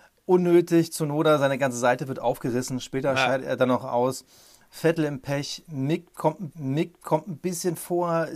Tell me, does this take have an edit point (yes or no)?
yes